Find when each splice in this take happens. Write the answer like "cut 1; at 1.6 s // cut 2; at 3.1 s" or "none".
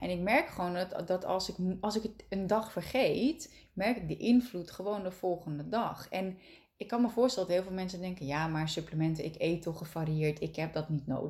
none